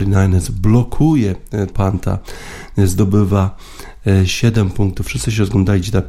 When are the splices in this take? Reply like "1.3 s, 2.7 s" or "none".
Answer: 1.7 s